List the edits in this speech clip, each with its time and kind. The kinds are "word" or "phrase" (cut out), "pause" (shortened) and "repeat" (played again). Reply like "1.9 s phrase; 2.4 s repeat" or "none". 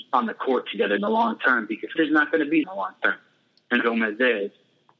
1.0 s word; 2.0 s word; 2.6 s word; 3.8 s word